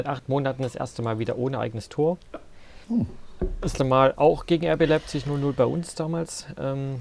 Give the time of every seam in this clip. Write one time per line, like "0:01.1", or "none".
0:02.8
0:03.8